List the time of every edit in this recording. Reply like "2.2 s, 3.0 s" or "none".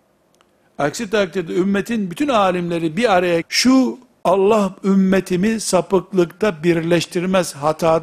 3.4 s